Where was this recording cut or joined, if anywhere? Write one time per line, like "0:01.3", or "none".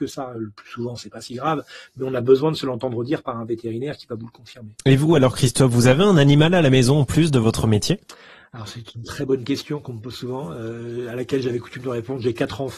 none

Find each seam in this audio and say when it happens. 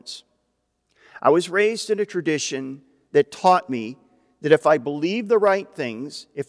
none

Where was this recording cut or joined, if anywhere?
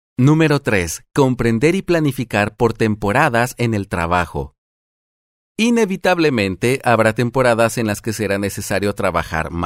none

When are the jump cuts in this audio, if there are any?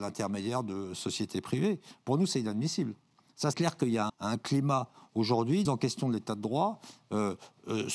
0:03.5
0:04.1
0:05.7

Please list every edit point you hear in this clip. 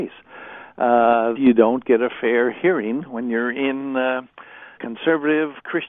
0:01.3
0:04.8

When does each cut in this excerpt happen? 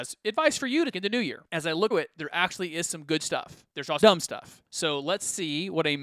0:00.9
0:01.5
0:01.9
0:03.7
0:04.0
0:04.7

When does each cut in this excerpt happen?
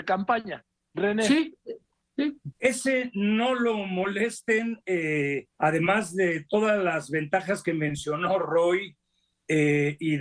0:02.5
0:05.5

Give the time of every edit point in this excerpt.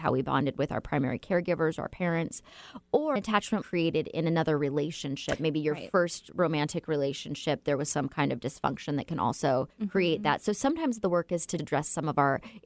0:03.2
0:03.6
0:09.7
0:11.6

